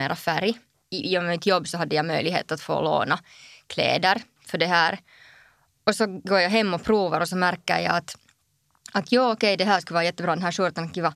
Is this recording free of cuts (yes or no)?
yes